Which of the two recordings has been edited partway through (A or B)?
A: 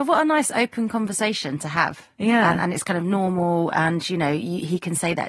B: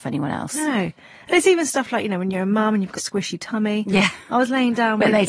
B